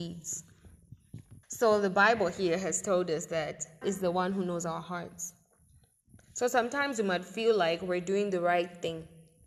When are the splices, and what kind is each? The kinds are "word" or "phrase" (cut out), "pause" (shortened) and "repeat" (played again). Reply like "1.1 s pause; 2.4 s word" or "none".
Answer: 1.4 s pause; 3.8 s word